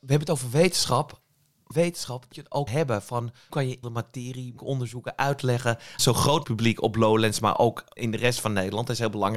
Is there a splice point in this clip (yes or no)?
yes